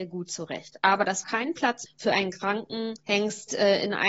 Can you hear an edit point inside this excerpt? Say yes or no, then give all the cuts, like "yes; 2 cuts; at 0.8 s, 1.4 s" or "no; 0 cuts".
yes; 3 cuts; at 1.2 s, 1.9 s, 3.0 s